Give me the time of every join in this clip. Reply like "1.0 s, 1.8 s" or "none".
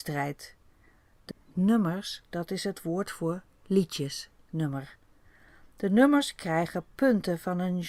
1.3 s, 4.4 s